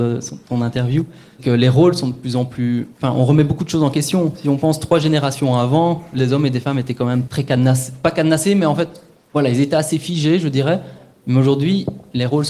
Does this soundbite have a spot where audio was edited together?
yes; 3 cuts; at 1.4 s, 6.2 s, 7.3 s

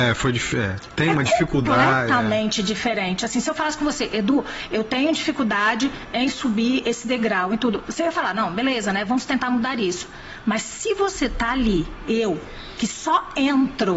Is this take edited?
no; 0 cuts

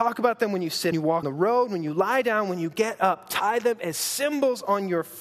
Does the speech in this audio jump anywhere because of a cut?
yes; 2 cuts; at 0.9 s, 1.2 s

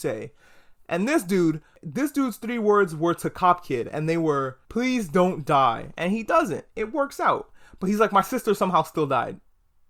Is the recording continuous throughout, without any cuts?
yes; 0 cuts

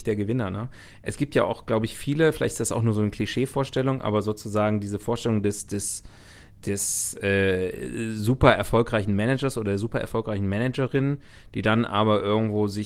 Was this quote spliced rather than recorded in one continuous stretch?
no; 0 cuts

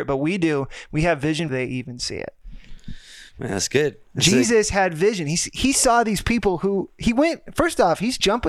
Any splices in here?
yes; 1 cut; at 1.5 s

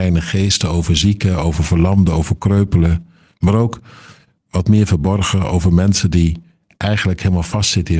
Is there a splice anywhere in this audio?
no; 0 cuts

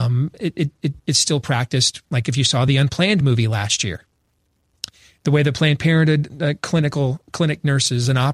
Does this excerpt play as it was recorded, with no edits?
yes; 0 cuts

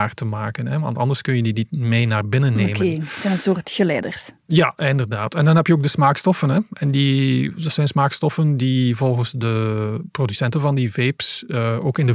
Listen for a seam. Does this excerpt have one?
no; 0 cuts

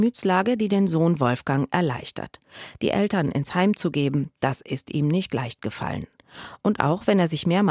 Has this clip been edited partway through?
no; 0 cuts

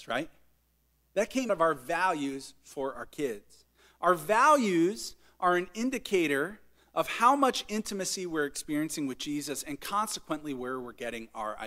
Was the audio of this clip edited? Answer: yes; 1 cut; at 1.5 s

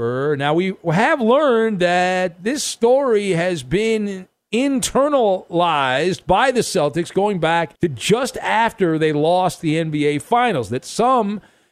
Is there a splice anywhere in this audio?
yes; 1 cut; at 7.8 s

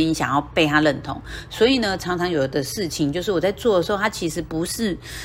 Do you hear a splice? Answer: no; 0 cuts

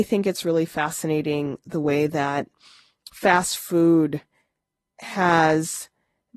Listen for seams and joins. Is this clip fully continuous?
yes; 0 cuts

